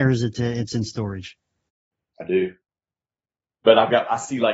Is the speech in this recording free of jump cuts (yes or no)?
yes